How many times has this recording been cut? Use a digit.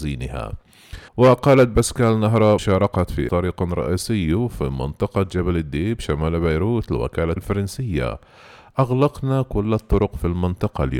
4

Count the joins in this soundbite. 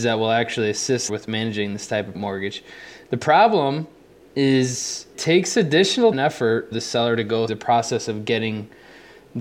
6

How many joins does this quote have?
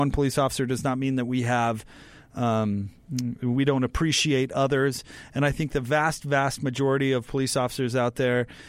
0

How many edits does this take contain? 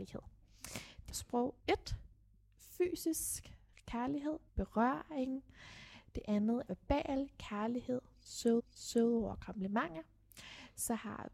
5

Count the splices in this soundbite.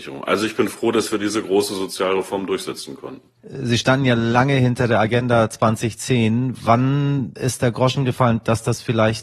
1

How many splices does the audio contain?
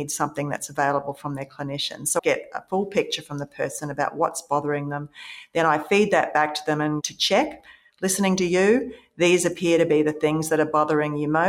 1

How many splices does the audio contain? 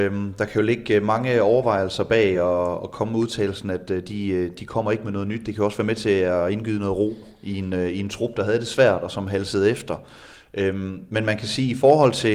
0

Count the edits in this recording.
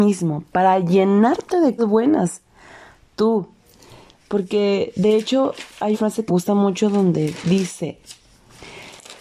3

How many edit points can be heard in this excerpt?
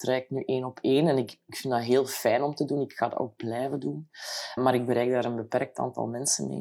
1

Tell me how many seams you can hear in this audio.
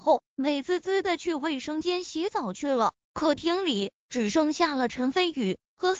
1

